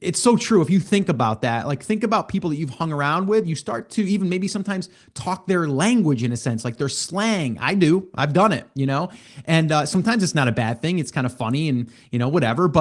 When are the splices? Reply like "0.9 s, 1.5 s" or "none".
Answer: none